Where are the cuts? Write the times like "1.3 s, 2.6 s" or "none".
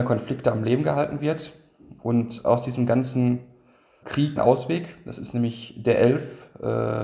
4.0 s, 4.4 s